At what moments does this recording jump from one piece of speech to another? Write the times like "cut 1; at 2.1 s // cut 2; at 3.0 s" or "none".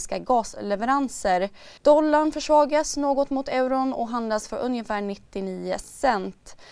cut 1; at 1.8 s

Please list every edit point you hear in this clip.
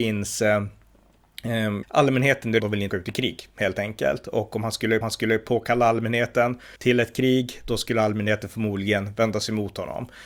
cut 1; at 1.8 s // cut 2; at 2.6 s // cut 3; at 2.9 s // cut 4; at 5.0 s // cut 5; at 6.8 s

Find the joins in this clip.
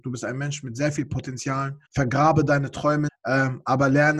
cut 1; at 1.8 s // cut 2; at 3.1 s

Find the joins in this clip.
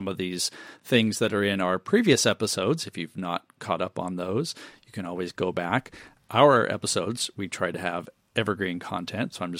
none

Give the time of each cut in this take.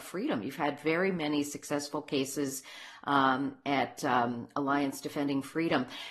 none

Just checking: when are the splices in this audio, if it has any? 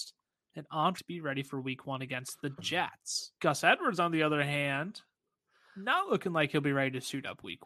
cut 1; at 1.0 s // cut 2; at 3.4 s

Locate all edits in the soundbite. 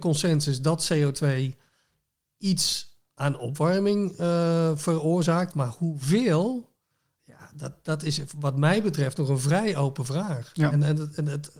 none

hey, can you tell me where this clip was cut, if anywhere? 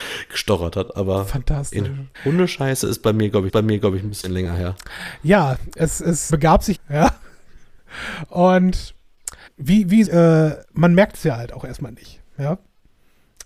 cut 1; at 2.1 s // cut 2; at 3.5 s // cut 3; at 6.3 s // cut 4; at 6.7 s // cut 5; at 9.5 s // cut 6; at 10.1 s // cut 7; at 10.6 s

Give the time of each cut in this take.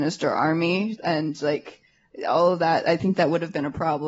none

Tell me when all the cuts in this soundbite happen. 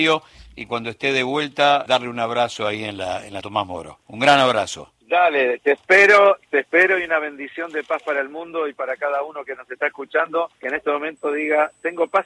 cut 1; at 1.9 s // cut 2; at 3.4 s // cut 3; at 4.0 s // cut 4; at 10.6 s

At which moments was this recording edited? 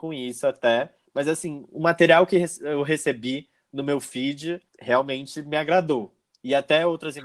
cut 1; at 4.7 s

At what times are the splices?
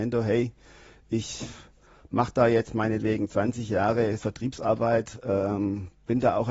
cut 1; at 4.2 s

